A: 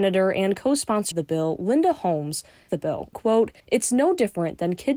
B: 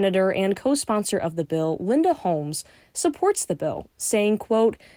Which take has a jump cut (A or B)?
A